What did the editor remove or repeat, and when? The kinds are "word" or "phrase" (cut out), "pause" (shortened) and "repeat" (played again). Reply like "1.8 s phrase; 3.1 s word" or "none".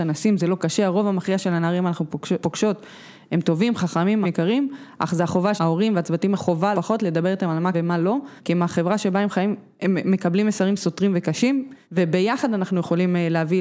2.4 s word; 4.2 s word; 5.6 s word; 6.3 s word; 6.7 s word; 7.7 s word; 8.4 s pause; 11.8 s pause